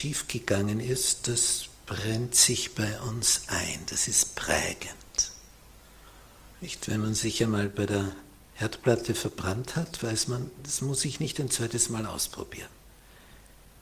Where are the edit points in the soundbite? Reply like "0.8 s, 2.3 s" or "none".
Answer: 6.5 s